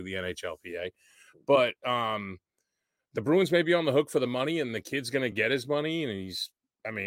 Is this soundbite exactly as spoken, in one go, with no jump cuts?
yes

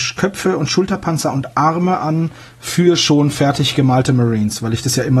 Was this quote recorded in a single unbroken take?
yes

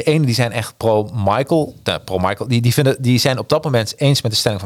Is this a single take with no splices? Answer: yes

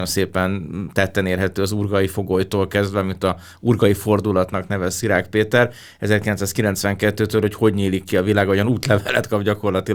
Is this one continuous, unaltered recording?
yes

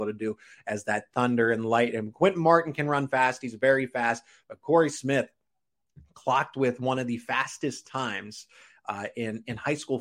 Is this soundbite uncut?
yes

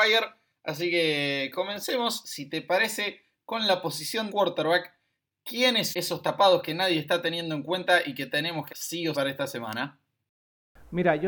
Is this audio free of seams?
no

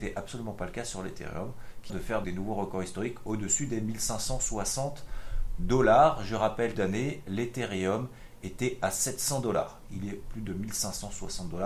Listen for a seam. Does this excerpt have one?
yes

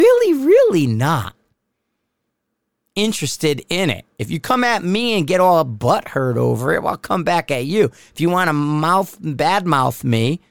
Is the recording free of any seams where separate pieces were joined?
yes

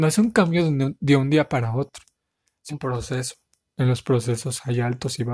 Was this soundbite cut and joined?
yes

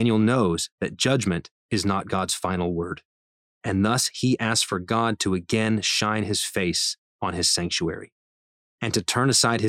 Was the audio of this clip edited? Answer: no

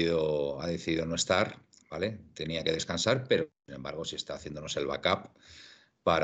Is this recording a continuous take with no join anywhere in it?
yes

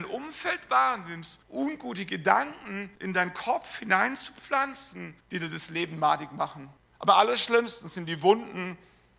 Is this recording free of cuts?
no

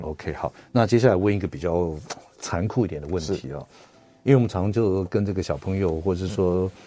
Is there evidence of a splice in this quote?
no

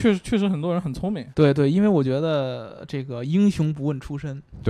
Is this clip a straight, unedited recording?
no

